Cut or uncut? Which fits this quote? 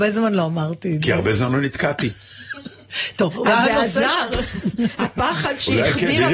uncut